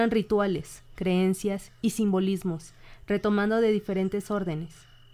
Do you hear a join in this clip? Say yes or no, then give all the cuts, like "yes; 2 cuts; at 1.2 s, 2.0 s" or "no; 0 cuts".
no; 0 cuts